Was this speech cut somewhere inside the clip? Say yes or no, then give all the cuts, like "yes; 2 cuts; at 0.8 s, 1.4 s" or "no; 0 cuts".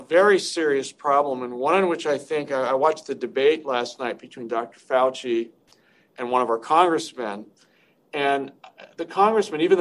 no; 0 cuts